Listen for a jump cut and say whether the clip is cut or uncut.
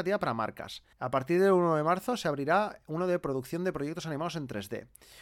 cut